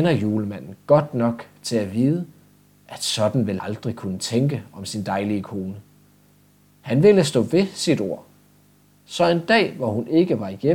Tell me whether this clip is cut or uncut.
cut